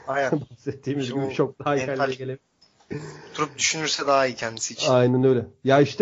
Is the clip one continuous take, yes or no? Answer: no